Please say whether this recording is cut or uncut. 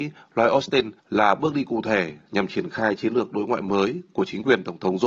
cut